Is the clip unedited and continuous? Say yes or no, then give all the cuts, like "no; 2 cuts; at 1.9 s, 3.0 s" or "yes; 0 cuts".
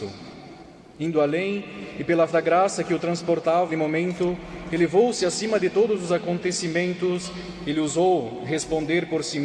no; 2 cuts; at 2.3 s, 3.7 s